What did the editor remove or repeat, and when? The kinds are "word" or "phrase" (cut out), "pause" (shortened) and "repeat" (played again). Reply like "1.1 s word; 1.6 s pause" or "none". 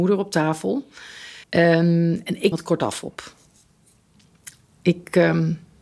1.4 s pause; 2.5 s phrase